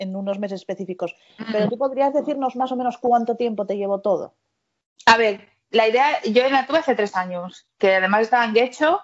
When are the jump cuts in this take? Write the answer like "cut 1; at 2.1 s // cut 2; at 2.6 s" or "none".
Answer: none